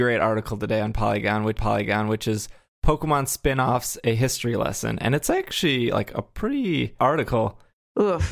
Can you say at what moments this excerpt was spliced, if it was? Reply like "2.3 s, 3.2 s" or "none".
1.6 s, 7.0 s